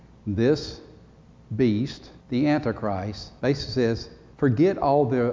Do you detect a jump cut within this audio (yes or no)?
yes